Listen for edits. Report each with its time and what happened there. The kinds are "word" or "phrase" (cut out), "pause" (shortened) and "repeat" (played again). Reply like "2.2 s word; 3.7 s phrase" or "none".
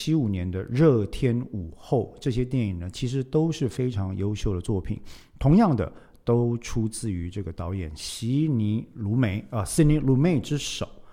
none